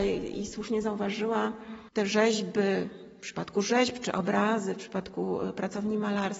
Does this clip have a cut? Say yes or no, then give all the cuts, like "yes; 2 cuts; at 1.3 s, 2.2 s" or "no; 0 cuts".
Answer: no; 0 cuts